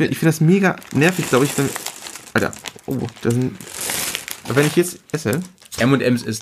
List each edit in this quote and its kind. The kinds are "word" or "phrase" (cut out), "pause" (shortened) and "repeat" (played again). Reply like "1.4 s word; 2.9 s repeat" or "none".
2.8 s pause; 5.0 s pause

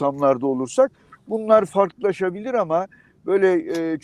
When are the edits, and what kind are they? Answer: none

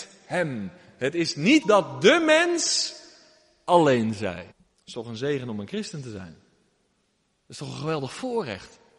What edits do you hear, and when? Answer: 1.6 s word; 4.5 s pause

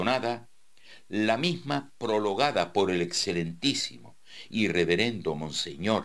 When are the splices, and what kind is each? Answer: none

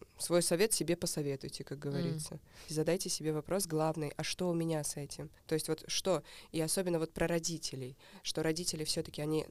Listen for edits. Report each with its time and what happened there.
2.7 s phrase; 5.4 s pause

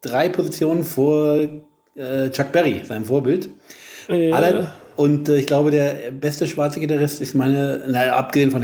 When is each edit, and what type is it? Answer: none

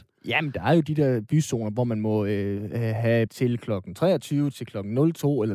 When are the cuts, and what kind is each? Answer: 3.3 s word

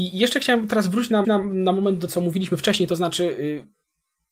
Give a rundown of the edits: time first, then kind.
1.2 s repeat; 2.1 s word

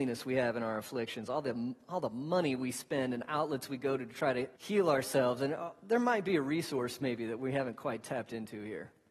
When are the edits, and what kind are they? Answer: 4.6 s pause

